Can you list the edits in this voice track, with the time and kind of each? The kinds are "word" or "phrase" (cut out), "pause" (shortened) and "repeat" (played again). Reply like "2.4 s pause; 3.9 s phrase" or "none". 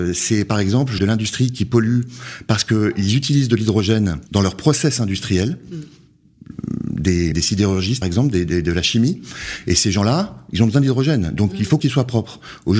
1.0 s phrase; 4.3 s pause; 7.3 s word; 8.0 s word; 11.8 s phrase